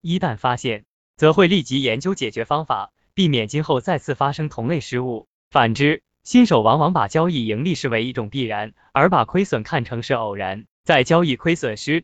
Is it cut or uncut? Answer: cut